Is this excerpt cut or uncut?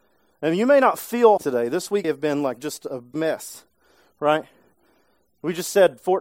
cut